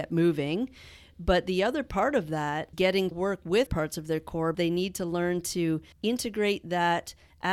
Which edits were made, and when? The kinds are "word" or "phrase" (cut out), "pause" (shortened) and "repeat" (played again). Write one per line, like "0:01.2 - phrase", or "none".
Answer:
0:02.7 - word
0:03.1 - word
0:03.7 - word
0:04.5 - word
0:05.9 - pause